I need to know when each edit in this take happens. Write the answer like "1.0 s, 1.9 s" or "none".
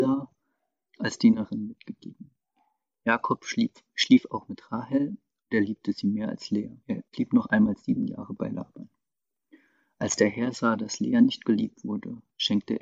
none